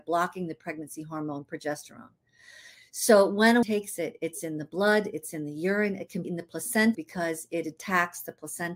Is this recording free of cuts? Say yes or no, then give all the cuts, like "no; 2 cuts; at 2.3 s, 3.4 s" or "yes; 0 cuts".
no; 3 cuts; at 3.6 s, 6.2 s, 6.9 s